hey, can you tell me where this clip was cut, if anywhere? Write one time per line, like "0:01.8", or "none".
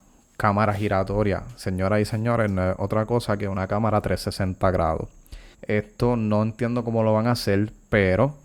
0:05.5